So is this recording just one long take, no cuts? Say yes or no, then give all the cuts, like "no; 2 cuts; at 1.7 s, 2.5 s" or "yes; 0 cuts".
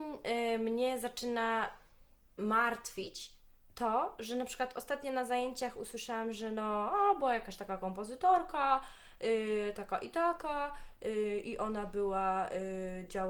yes; 0 cuts